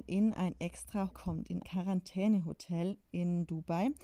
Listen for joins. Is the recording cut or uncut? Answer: cut